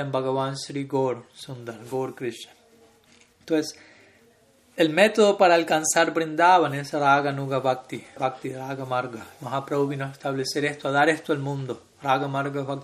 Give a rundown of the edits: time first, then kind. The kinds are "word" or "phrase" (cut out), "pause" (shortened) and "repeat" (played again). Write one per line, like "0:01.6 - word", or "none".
0:08.2 - word